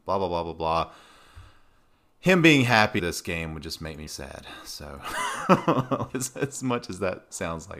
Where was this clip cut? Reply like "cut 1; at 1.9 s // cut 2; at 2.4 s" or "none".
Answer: cut 1; at 3.0 s // cut 2; at 4.1 s // cut 3; at 6.1 s